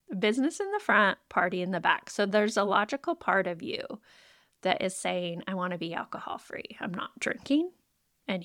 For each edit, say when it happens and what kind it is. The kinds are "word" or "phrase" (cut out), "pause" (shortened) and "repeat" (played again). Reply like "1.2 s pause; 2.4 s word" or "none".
none